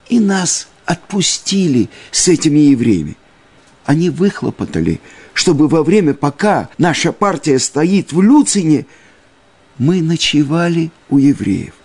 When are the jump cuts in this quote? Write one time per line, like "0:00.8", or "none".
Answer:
0:06.7